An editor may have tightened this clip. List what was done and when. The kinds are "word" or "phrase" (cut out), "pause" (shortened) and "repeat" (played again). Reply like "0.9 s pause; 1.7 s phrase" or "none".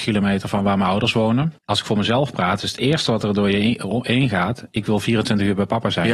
1.6 s pause